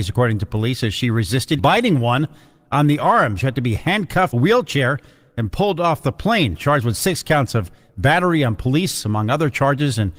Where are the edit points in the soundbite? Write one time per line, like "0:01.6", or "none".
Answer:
0:01.6
0:04.3